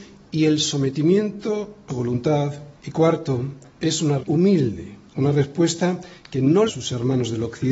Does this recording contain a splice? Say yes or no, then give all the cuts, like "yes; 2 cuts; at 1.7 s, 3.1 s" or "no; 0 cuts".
yes; 6 cuts; at 1.9 s, 2.7 s, 3.7 s, 4.2 s, 5.1 s, 6.7 s